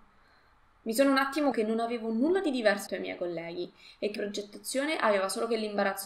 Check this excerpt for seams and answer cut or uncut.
cut